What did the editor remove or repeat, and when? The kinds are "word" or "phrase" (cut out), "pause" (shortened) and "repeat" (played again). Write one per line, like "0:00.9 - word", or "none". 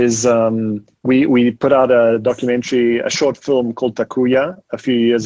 0:00.9 - pause